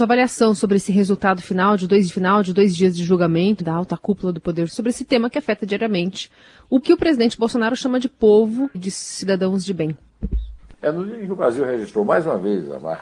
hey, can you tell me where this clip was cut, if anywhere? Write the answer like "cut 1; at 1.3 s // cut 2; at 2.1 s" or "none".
cut 1; at 2.1 s // cut 2; at 3.6 s // cut 3; at 4.7 s // cut 4; at 6.8 s // cut 5; at 8.7 s // cut 6; at 10.8 s